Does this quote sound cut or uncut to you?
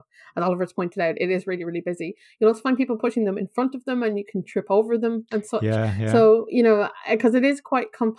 uncut